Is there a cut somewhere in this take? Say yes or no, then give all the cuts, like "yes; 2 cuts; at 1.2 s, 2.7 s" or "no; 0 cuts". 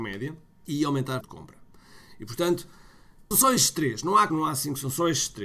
yes; 3 cuts; at 1.2 s, 3.3 s, 4.3 s